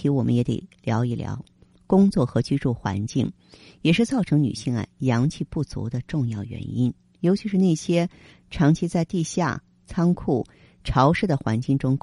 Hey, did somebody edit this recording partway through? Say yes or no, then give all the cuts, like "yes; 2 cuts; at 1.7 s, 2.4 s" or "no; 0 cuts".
no; 0 cuts